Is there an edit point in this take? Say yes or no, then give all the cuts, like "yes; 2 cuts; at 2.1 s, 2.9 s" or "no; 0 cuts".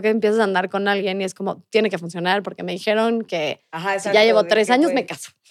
no; 0 cuts